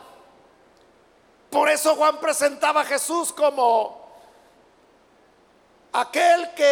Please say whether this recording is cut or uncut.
uncut